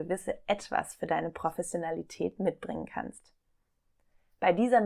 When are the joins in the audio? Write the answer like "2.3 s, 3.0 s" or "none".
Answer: none